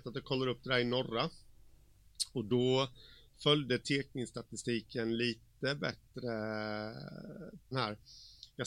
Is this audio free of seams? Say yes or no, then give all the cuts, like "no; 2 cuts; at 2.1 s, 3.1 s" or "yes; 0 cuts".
no; 1 cut; at 7.7 s